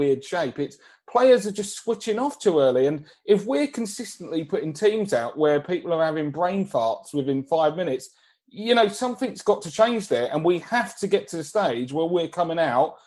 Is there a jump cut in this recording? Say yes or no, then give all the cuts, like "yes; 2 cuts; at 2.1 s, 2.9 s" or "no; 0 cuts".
no; 0 cuts